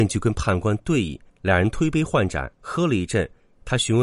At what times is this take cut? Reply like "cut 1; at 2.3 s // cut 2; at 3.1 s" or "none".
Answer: cut 1; at 1.3 s // cut 2; at 2.5 s